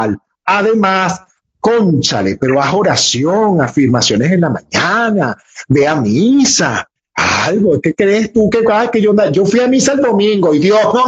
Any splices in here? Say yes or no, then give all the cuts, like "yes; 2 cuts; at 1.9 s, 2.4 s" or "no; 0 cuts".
no; 0 cuts